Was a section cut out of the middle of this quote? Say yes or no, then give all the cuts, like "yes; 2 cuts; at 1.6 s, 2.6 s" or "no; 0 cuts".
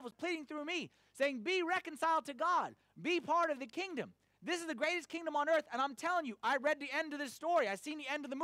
no; 0 cuts